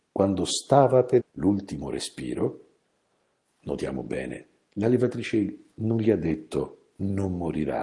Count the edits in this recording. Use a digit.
1